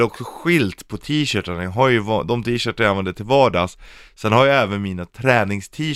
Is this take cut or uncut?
uncut